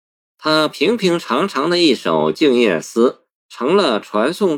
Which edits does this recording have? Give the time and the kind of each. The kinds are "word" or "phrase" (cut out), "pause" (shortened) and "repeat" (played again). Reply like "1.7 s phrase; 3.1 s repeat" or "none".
3.4 s pause